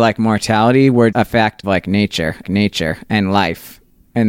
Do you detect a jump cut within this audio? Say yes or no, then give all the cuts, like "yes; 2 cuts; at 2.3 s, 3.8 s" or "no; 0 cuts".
yes; 3 cuts; at 1.1 s, 1.6 s, 2.4 s